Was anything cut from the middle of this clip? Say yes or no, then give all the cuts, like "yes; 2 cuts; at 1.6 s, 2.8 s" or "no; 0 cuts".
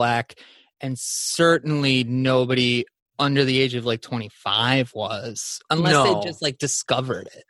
no; 0 cuts